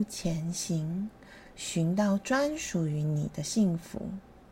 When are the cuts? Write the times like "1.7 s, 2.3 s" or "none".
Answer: none